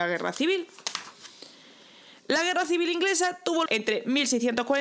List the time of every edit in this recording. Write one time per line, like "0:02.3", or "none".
0:03.7